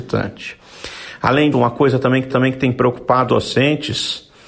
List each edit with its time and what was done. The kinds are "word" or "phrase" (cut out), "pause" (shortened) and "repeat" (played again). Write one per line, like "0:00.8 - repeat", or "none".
0:01.5 - word
0:02.3 - repeat
0:03.3 - word